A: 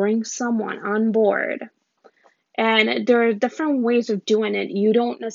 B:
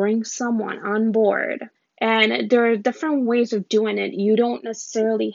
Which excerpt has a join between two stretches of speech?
B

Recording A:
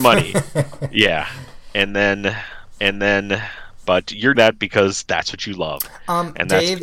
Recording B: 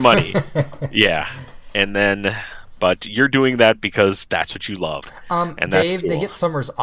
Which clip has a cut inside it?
A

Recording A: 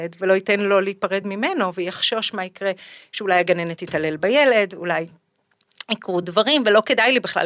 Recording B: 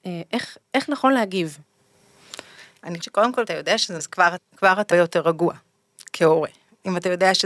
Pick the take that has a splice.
B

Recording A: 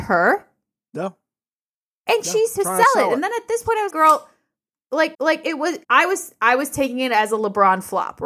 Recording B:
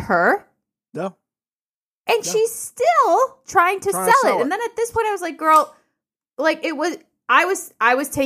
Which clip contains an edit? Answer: A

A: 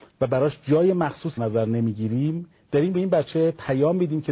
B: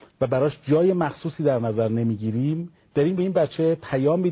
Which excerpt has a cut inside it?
A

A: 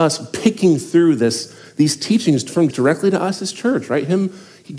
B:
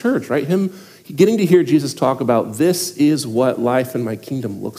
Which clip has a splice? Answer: A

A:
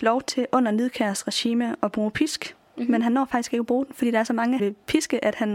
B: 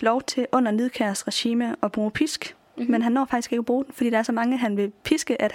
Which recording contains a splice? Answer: A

